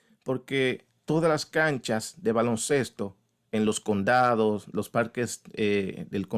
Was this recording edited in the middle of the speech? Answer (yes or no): no